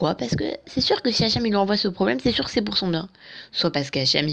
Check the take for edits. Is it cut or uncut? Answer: uncut